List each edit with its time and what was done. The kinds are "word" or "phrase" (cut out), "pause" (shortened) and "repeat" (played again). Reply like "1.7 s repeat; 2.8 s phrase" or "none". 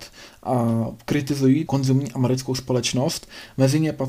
1.7 s word